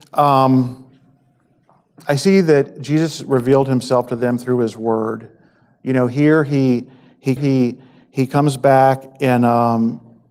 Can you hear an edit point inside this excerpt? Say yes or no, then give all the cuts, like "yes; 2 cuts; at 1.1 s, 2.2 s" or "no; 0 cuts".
yes; 1 cut; at 7.4 s